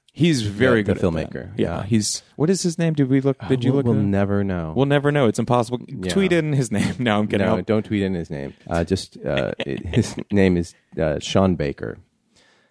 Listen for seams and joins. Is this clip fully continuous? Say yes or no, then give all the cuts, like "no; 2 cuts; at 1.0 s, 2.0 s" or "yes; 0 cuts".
no; 2 cuts; at 2.3 s, 8.6 s